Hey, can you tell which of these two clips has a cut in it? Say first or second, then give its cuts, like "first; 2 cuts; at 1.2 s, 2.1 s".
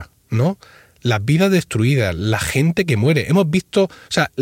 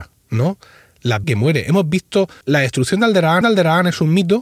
second; 3 cuts; at 1.2 s, 2.4 s, 3.4 s